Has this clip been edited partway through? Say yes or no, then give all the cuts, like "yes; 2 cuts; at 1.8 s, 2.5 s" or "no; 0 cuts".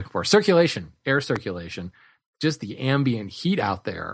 no; 0 cuts